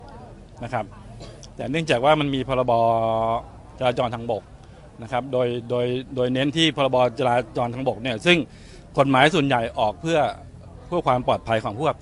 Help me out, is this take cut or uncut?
uncut